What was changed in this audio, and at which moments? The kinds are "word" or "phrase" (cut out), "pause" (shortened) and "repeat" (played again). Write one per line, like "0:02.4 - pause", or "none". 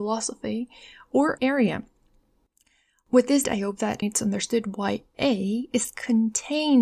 0:01.4 - phrase
0:03.4 - phrase
0:04.0 - word
0:05.1 - word

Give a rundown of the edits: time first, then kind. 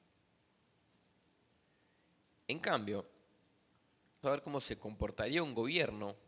0:04.2 - word

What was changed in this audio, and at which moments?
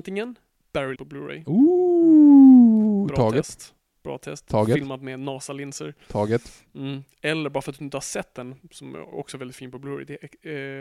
0:00.9 - word

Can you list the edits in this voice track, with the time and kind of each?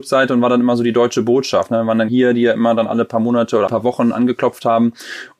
0:02.1 - phrase
0:03.7 - word

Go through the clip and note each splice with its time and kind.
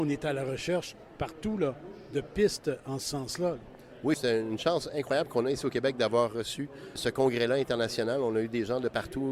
none

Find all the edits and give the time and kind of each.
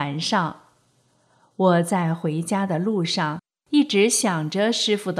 none

